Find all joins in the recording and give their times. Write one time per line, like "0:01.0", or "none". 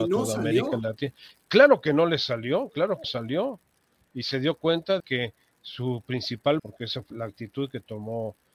0:03.0
0:05.0
0:06.6
0:07.1